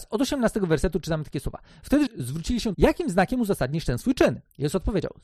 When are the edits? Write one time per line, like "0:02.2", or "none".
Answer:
0:02.1
0:02.7

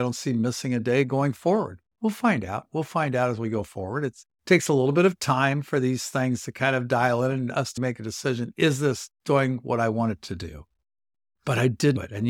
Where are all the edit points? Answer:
0:04.3
0:07.8

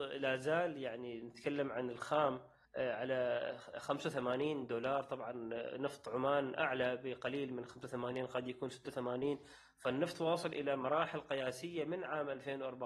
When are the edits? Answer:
0:02.6

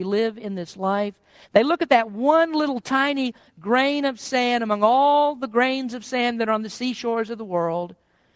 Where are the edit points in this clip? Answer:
none

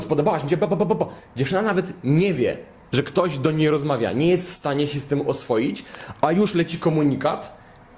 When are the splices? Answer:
none

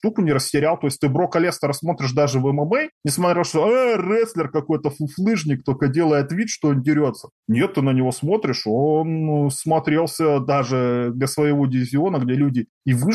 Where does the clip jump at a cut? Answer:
none

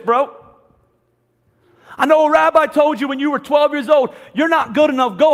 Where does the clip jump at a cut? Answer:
none

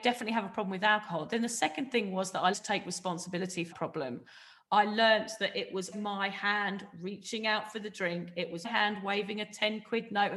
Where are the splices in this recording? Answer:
0:02.5
0:03.7
0:05.9
0:08.6

